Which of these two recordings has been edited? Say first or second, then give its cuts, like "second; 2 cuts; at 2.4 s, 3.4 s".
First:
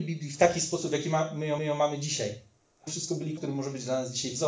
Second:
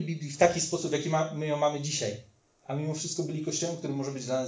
first; 3 cuts; at 1.6 s, 2.9 s, 3.4 s